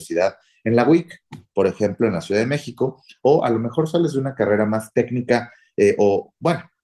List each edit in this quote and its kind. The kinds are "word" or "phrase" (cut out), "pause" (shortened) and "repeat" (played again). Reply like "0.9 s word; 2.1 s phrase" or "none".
none